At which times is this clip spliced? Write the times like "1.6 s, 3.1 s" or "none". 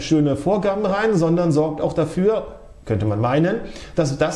none